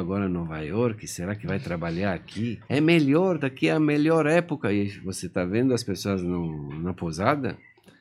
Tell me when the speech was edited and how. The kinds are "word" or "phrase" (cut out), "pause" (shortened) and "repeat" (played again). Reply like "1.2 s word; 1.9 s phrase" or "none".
2.6 s pause